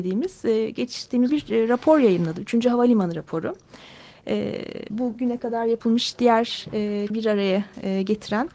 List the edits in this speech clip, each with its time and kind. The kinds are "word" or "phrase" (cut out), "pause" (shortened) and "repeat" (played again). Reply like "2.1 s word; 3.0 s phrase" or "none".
1.3 s word; 4.9 s word; 7.1 s word